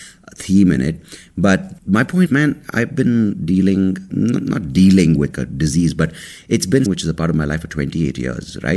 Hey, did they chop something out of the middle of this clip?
yes; 6 cuts; at 1.8 s, 2.3 s, 2.7 s, 4.1 s, 5.3 s, 6.9 s

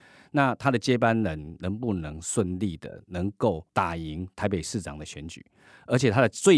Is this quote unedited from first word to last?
yes; 0 cuts

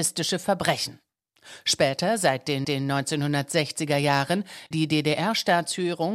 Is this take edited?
yes; 2 cuts; at 2.6 s, 4.7 s

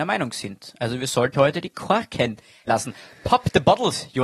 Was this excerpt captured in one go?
no; 2 cuts; at 1.3 s, 2.7 s

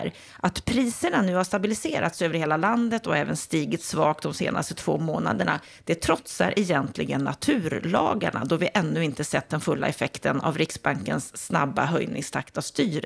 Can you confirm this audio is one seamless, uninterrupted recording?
yes; 0 cuts

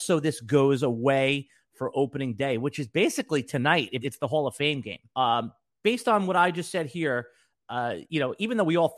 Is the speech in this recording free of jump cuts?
no; 2 cuts; at 4.0 s, 5.1 s

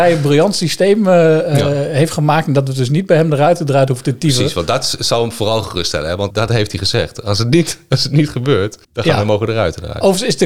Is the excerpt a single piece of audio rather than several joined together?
no; 2 cuts; at 6.3 s, 8.8 s

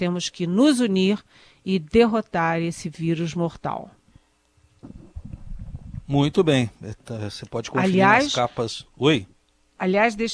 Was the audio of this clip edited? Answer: no; 0 cuts

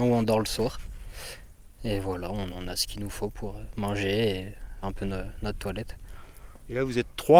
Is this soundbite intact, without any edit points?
no; 3 cuts; at 2.5 s, 3.3 s, 4.8 s

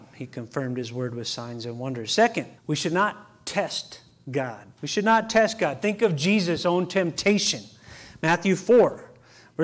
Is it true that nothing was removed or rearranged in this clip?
no; 2 cuts; at 2.6 s, 4.7 s

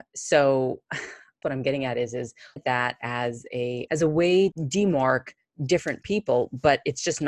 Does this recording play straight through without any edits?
no; 4 cuts; at 1.4 s, 2.6 s, 3.9 s, 4.5 s

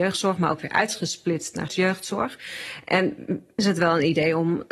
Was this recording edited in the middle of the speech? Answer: yes; 2 cuts; at 1.7 s, 3.6 s

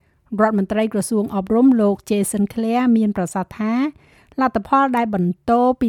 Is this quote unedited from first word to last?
yes; 0 cuts

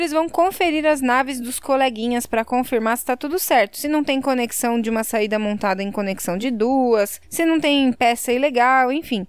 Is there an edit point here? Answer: no; 0 cuts

